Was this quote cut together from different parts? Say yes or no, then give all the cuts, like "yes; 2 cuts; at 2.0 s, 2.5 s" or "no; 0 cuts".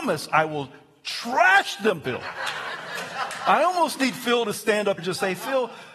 yes; 2 cuts; at 2.0 s, 5.0 s